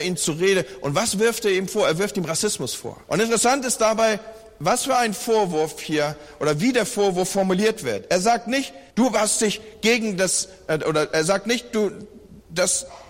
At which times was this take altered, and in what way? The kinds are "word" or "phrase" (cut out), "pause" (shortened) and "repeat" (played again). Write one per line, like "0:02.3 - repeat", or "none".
0:03.0 - pause
0:08.9 - pause

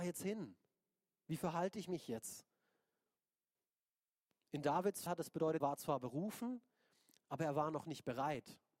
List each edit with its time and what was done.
0:05.1 - word
0:05.6 - word

